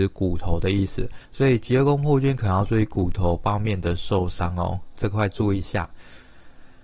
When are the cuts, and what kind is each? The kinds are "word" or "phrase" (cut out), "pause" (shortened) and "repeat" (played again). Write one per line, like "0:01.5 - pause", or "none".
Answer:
0:01.2 - pause
0:05.0 - word